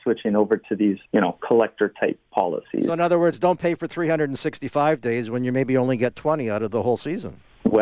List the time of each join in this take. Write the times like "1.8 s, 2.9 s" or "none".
1.1 s